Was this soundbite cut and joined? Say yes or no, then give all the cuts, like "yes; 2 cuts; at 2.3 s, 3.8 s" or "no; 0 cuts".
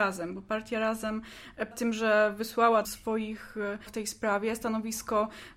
yes; 3 cuts; at 1.7 s, 2.8 s, 3.9 s